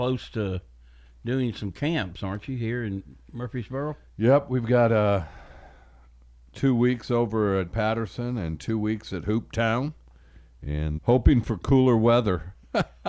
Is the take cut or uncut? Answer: cut